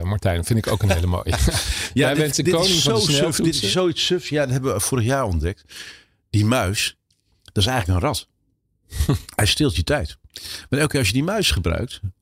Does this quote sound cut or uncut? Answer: uncut